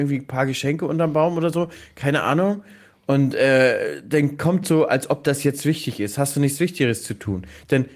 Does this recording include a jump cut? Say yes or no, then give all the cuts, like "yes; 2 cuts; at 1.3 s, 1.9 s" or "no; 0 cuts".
no; 0 cuts